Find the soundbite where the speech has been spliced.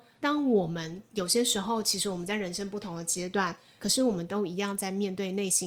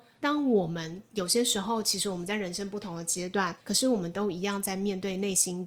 second; 1 cut; at 3.6 s

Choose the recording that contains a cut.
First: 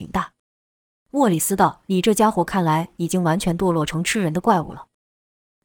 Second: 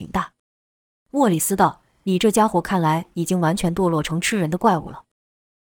first; 1 cut; at 1.8 s

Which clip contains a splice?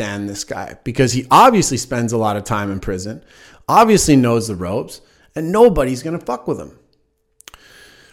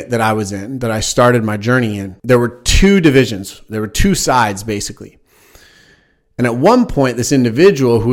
second; 1 cut; at 2.2 s

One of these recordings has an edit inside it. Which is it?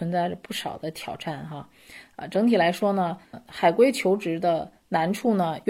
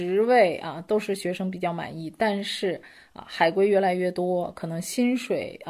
first; 1 cut; at 3.3 s

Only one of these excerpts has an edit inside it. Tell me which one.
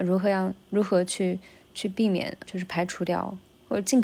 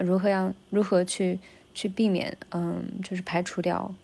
first; 1 cut; at 2.5 s

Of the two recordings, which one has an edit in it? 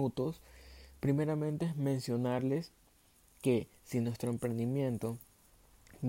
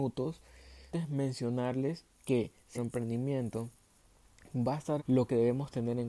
second; 4 cuts; at 0.9 s, 2.1 s, 2.7 s, 5.0 s

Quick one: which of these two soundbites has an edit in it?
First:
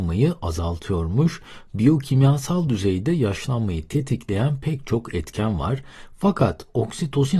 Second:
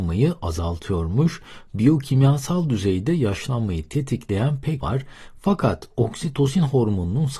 second; 1 cut; at 4.8 s

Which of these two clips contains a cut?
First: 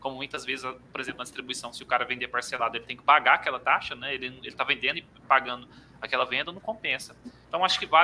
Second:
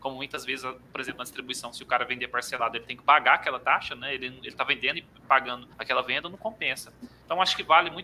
second; 1 cut; at 5.7 s

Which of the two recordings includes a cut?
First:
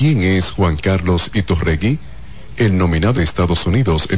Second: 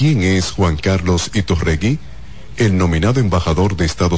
first; 1 cut; at 3.1 s

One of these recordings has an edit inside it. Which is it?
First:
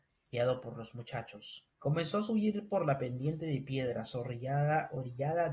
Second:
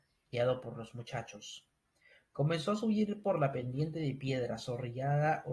first; 1 cut; at 1.7 s

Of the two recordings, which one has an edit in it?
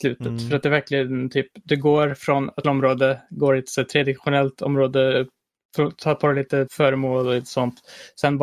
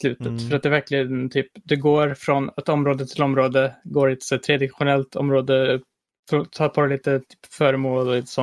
first; 2 cuts; at 2.6 s, 6.7 s

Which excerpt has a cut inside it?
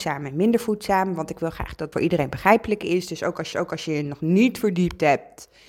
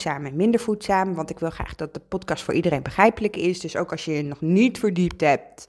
first; 2 cuts; at 1.9 s, 3.5 s

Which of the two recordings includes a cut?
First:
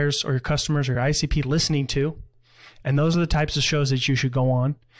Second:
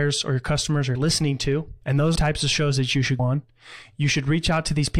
second; 4 cuts; at 0.9 s, 1.8 s, 2.2 s, 3.2 s

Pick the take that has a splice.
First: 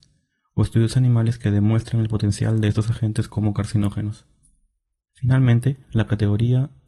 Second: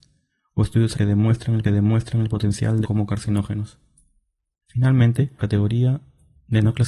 second; 4 cuts; at 0.9 s, 1.6 s, 2.8 s, 5.4 s

